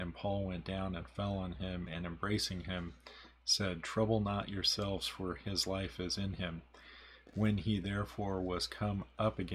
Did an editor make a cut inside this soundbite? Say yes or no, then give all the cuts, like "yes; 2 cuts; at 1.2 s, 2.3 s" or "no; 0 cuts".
no; 0 cuts